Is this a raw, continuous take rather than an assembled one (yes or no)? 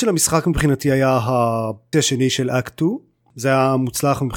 no